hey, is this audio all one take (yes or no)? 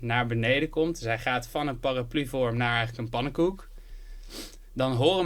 yes